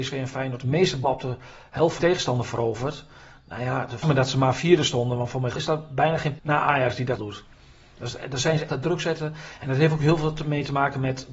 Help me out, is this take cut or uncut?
cut